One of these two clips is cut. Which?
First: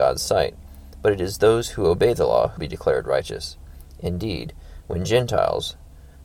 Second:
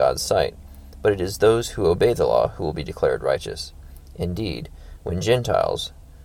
first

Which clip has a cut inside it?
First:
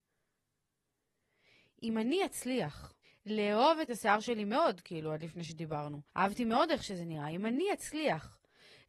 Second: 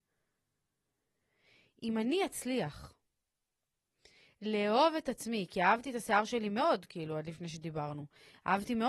first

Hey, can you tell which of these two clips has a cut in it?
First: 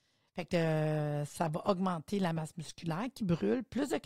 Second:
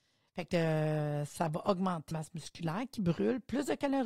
second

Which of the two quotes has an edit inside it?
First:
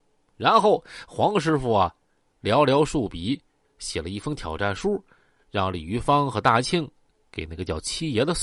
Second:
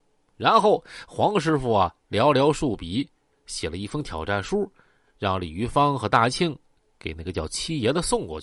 second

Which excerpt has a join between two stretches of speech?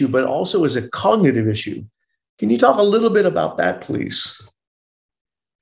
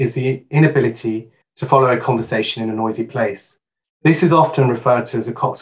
second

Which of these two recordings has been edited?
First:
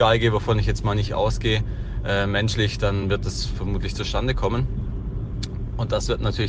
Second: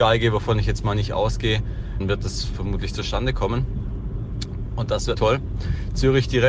second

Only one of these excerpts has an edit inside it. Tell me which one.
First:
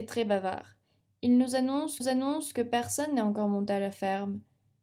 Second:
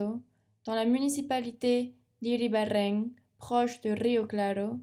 first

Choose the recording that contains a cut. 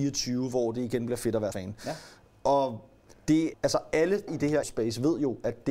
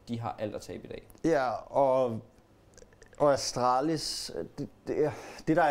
first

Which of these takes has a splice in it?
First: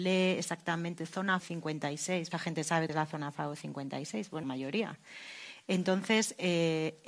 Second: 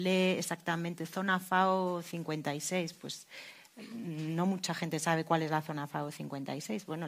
first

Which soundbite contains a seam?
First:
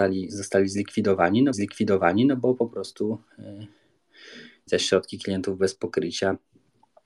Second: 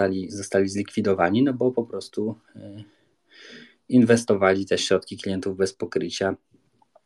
first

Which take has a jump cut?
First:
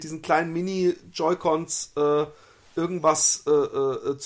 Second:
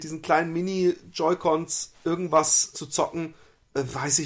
second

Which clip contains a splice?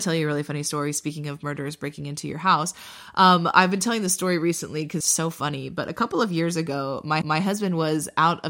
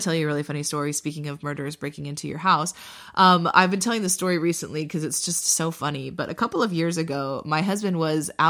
first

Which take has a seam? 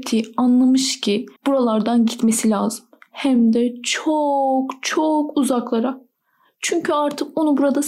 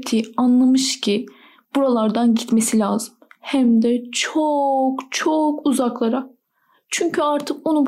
first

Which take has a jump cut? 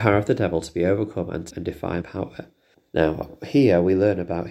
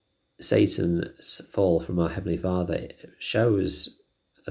first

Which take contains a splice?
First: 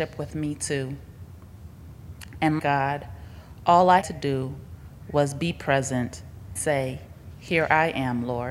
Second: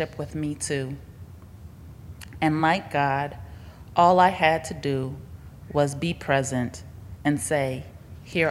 first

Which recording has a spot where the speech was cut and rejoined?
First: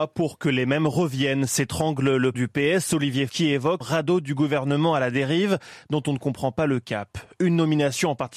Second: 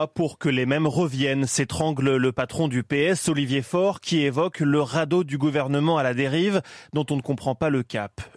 first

